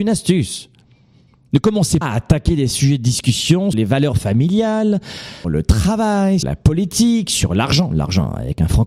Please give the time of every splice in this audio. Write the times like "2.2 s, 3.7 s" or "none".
2.0 s, 3.7 s, 5.4 s, 6.4 s